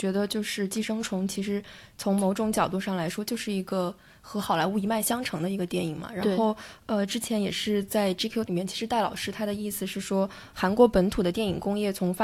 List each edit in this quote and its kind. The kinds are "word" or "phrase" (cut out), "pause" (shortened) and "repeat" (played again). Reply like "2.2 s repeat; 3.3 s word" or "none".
8.5 s word